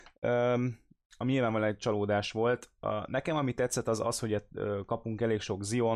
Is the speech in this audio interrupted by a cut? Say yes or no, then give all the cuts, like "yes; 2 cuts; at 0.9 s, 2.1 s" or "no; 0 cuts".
no; 0 cuts